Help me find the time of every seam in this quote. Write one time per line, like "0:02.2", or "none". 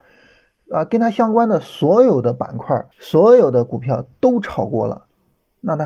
0:02.9